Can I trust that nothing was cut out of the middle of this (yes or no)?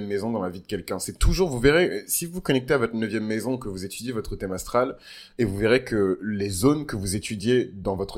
yes